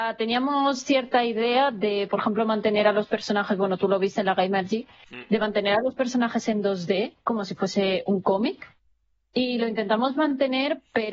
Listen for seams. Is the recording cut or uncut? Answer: uncut